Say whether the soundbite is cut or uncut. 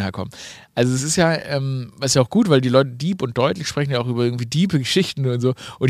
uncut